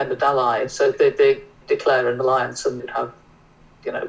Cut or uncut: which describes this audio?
cut